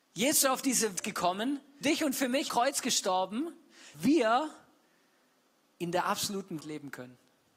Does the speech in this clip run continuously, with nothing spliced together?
no; 5 cuts; at 1.0 s, 1.8 s, 2.5 s, 3.9 s, 6.6 s

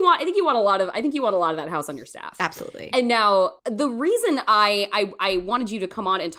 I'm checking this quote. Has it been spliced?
yes; 1 cut; at 3.6 s

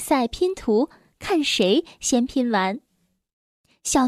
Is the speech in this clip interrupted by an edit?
no; 0 cuts

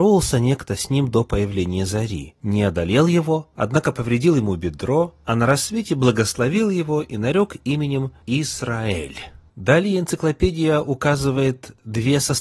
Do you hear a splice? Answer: no; 0 cuts

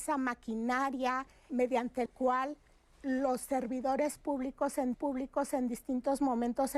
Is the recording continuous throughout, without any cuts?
no; 3 cuts; at 1.5 s, 2.1 s, 4.9 s

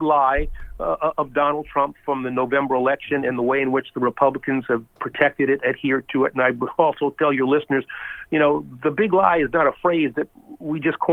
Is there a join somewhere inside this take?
no; 0 cuts

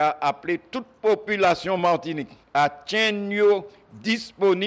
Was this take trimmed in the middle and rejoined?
no; 0 cuts

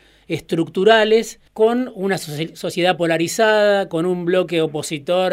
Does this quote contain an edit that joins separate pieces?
yes; 1 cut; at 1.5 s

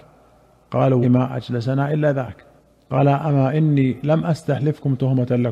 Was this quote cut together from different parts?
yes; 2 cuts; at 1.0 s, 2.6 s

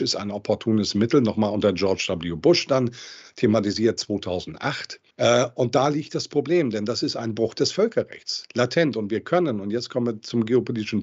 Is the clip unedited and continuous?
no; 1 cut; at 5.1 s

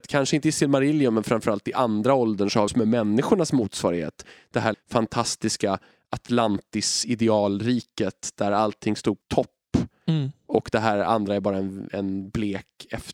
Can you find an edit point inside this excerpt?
yes; 3 cuts; at 2.7 s, 4.7 s, 9.2 s

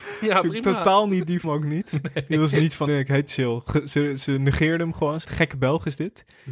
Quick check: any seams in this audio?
yes; 4 cuts; at 1.4 s, 2.9 s, 3.3 s, 5.2 s

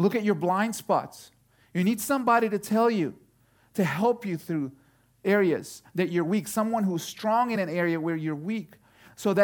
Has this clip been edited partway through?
no; 0 cuts

